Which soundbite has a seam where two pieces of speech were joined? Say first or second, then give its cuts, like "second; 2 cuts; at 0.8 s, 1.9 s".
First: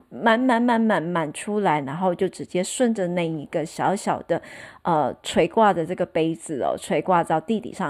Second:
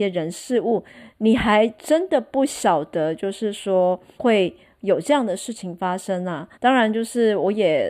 second; 2 cuts; at 4.2 s, 6.5 s